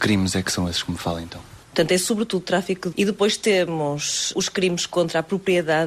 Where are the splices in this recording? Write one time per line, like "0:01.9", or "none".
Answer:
0:02.9
0:04.3

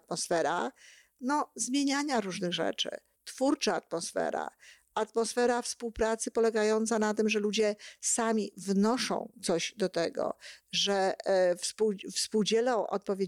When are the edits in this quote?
none

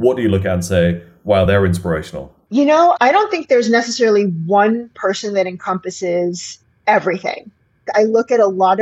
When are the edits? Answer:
none

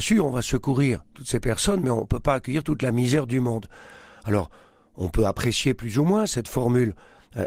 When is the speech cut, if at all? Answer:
none

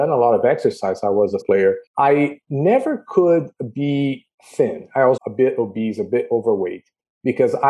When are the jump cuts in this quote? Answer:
0:01.4
0:01.9
0:04.3
0:05.2

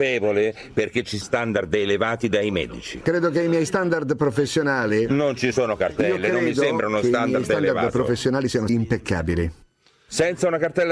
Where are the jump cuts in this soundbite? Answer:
0:01.2
0:08.7

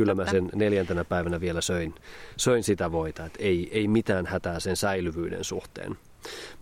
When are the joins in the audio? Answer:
none

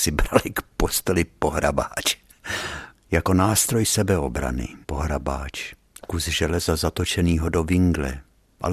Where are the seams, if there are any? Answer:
0:04.8

